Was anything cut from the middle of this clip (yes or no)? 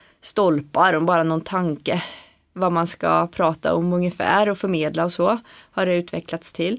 no